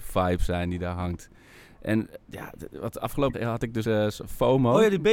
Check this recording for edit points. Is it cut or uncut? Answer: cut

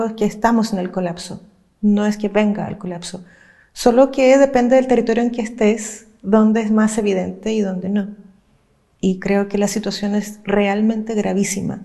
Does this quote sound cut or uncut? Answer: uncut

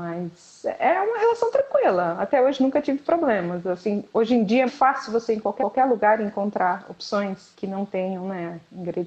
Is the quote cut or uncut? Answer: cut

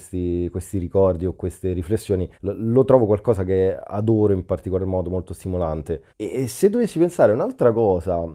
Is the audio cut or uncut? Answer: cut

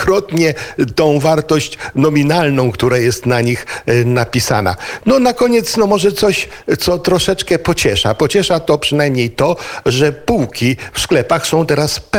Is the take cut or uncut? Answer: uncut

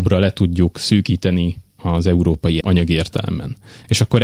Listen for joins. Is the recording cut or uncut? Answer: cut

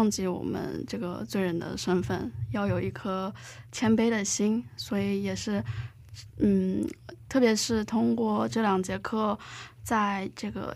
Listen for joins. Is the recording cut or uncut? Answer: uncut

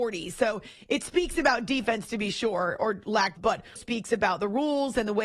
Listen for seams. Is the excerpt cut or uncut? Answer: cut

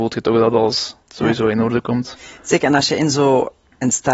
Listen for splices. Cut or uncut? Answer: cut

